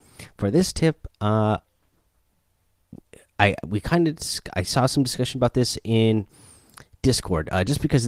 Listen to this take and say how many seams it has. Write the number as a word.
zero